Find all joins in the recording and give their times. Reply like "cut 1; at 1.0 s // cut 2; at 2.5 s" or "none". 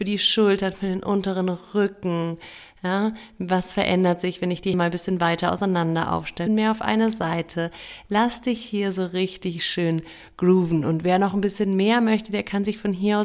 cut 1; at 4.7 s // cut 2; at 6.5 s